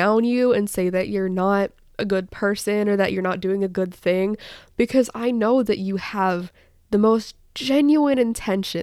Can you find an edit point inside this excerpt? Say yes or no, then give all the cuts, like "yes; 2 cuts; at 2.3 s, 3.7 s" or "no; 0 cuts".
no; 0 cuts